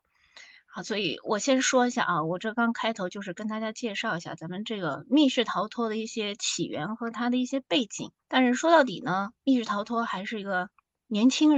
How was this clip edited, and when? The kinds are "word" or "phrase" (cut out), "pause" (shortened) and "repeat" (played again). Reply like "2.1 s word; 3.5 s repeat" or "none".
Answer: 8.2 s pause